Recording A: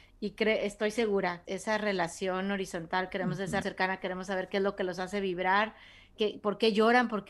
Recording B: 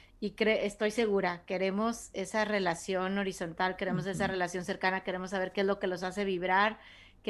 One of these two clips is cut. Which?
A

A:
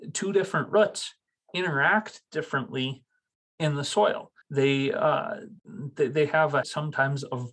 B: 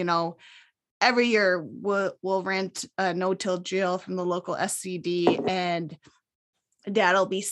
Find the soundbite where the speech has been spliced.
A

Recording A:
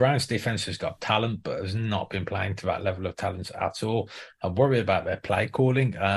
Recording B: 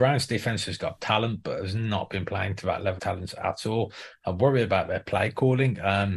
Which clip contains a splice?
B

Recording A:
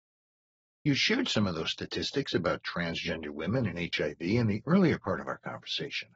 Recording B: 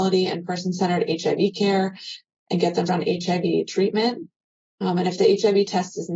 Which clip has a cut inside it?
B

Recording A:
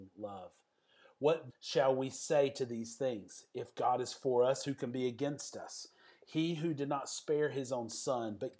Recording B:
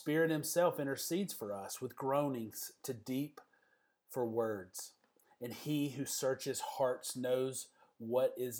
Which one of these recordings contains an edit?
A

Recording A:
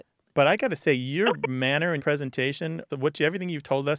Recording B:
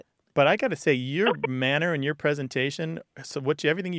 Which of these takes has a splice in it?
A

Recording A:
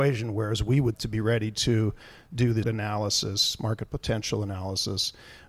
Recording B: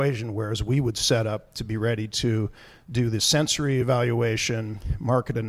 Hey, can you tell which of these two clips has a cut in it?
A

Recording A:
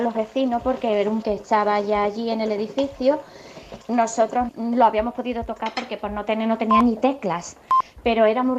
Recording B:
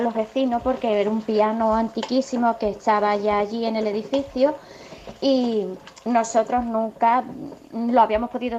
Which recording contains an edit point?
A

